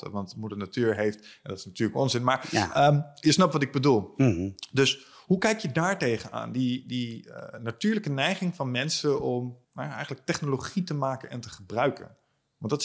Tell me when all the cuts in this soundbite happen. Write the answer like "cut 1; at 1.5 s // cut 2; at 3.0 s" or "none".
cut 1; at 9.6 s